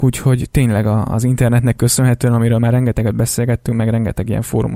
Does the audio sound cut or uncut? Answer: uncut